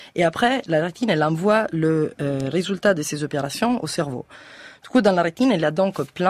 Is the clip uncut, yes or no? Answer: yes